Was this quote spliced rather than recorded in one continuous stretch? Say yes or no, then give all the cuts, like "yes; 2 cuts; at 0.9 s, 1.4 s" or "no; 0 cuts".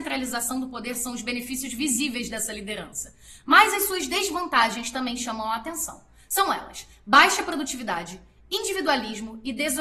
no; 0 cuts